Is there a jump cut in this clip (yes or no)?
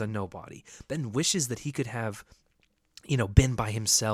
no